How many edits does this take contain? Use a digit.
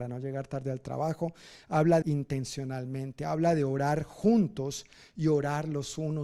1